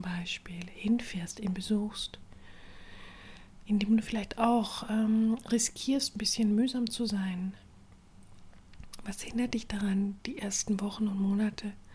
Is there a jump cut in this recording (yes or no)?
no